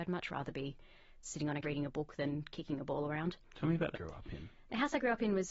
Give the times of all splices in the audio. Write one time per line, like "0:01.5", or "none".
0:01.6
0:03.4
0:03.9